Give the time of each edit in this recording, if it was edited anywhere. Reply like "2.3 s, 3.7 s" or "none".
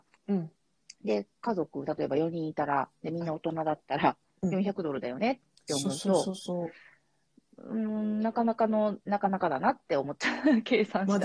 9.0 s